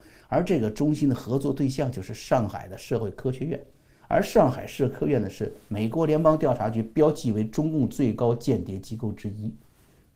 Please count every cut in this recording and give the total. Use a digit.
0